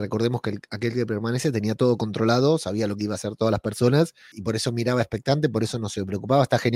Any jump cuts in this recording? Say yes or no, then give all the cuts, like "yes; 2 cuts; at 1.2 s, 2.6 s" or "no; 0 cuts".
yes; 1 cut; at 4.3 s